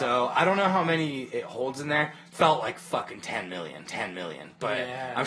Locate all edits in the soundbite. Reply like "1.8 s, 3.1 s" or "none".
3.9 s